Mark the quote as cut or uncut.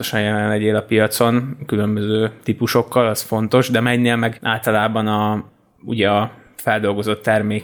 uncut